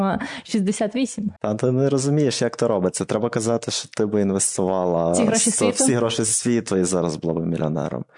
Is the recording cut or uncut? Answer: cut